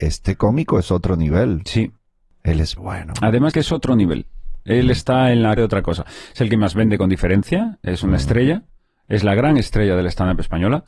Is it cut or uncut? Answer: cut